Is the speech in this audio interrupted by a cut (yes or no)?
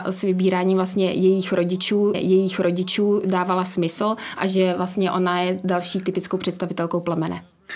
yes